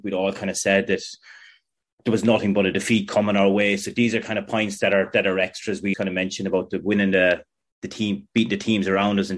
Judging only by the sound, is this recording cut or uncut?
cut